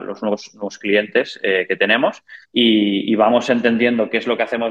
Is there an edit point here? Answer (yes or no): yes